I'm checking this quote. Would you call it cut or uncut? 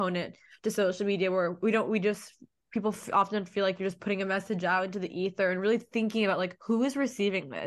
uncut